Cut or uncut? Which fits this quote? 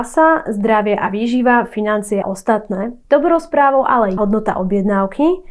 cut